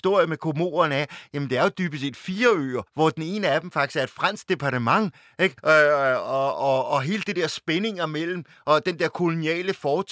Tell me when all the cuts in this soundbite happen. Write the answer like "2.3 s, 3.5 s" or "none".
2.9 s, 5.6 s